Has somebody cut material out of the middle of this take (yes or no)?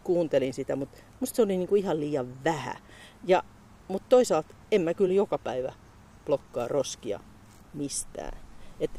no